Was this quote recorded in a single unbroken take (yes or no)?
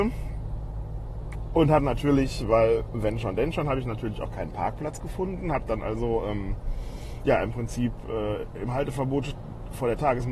yes